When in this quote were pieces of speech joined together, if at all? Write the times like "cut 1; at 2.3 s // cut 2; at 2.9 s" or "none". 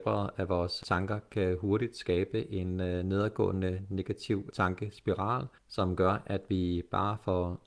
cut 1; at 5.6 s